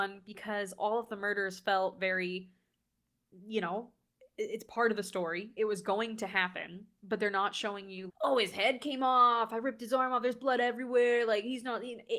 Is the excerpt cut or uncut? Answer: cut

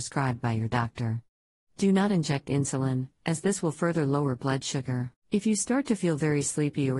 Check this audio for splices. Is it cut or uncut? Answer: cut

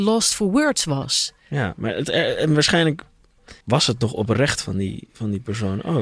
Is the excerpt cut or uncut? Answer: cut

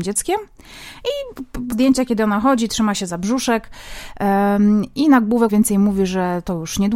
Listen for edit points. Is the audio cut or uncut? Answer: cut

